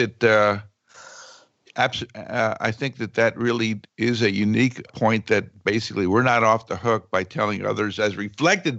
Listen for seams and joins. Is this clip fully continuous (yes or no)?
no